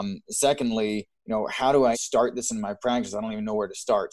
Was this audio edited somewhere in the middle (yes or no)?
yes